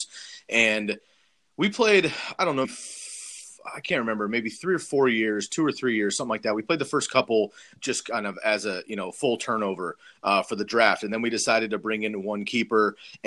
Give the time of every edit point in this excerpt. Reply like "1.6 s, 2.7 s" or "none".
2.6 s, 7.8 s